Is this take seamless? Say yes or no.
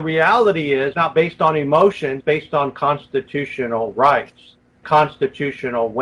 no